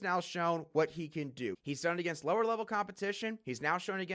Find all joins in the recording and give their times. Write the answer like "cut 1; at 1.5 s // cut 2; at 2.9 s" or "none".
none